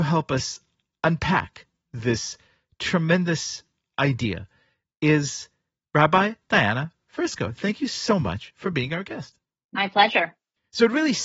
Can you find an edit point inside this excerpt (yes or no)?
no